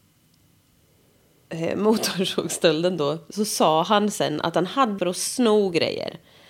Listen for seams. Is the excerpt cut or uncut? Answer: cut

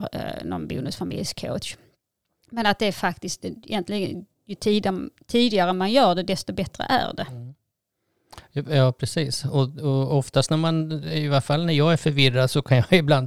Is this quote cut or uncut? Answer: uncut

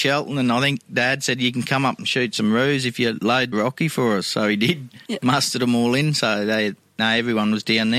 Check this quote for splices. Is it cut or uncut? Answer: cut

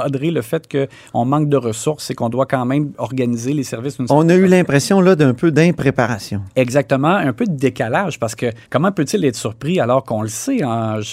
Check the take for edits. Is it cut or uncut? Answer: cut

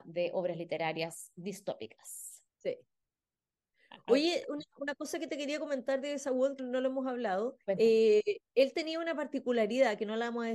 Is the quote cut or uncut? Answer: cut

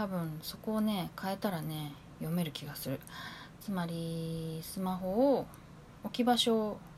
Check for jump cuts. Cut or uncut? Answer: uncut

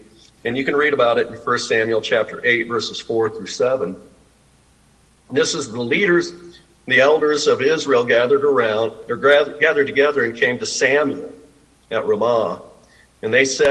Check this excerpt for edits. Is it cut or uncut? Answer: uncut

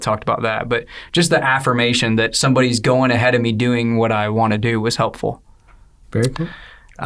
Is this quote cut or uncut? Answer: uncut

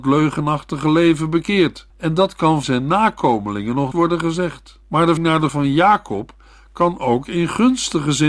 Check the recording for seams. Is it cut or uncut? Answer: cut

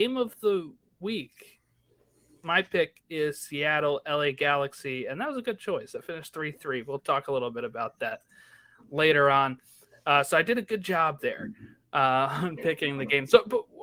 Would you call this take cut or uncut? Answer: uncut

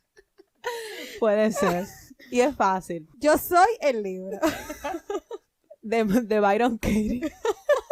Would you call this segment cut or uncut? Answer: cut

